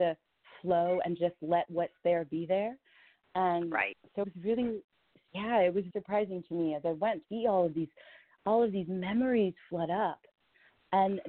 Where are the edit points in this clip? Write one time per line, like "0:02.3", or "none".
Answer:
0:04.2
0:05.9
0:07.2

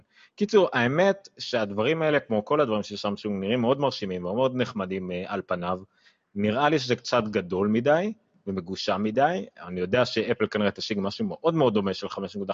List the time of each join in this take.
none

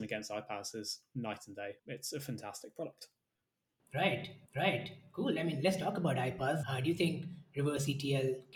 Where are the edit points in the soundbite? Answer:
0:01.8
0:04.5
0:06.6

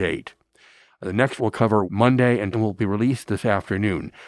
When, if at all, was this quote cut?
0:01.4
0:01.8
0:02.5

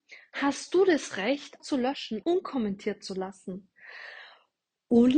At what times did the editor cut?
0:01.6
0:02.2

